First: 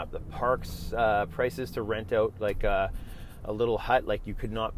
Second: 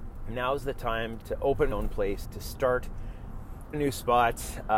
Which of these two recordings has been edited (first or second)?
second